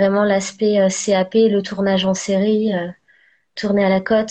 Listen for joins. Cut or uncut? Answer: uncut